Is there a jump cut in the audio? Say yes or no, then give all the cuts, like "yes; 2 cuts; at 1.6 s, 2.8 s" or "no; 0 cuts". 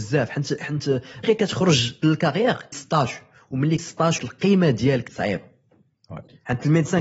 yes; 6 cuts; at 1.2 s, 2.0 s, 2.7 s, 3.8 s, 4.2 s, 5.1 s